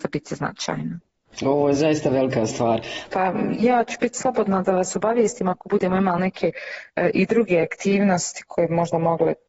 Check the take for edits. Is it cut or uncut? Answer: uncut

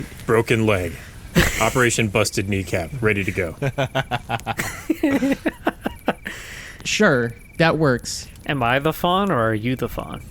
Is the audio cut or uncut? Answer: uncut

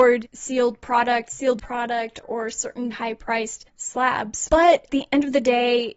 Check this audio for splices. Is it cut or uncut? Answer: cut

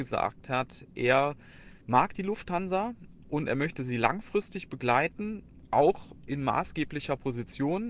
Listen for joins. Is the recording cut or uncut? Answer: cut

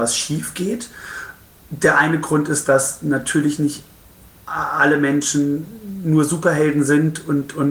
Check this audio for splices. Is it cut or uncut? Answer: uncut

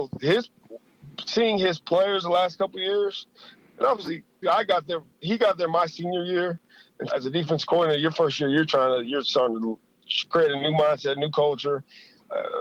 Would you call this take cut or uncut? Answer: cut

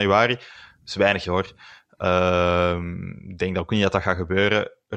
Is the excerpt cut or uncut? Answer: cut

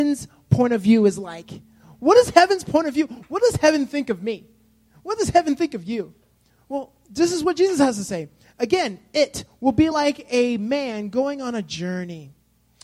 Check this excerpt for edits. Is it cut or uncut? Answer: uncut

